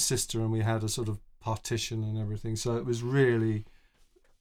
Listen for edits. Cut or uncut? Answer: uncut